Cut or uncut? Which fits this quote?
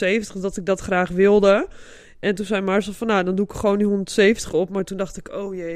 uncut